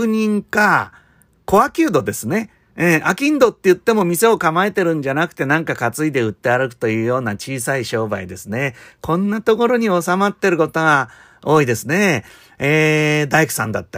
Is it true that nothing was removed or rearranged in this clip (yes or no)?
yes